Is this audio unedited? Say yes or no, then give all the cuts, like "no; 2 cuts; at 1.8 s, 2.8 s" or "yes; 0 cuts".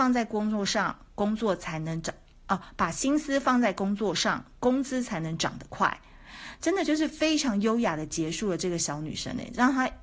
yes; 0 cuts